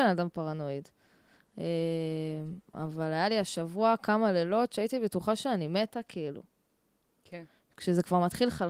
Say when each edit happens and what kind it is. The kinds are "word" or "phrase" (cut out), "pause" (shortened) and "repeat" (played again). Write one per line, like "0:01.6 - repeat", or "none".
none